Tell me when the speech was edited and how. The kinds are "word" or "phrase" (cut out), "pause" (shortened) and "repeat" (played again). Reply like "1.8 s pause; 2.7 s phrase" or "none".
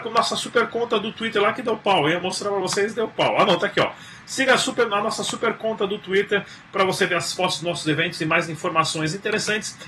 none